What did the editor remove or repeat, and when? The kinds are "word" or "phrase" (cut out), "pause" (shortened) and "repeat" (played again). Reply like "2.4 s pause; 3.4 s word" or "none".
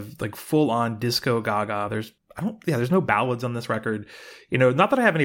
none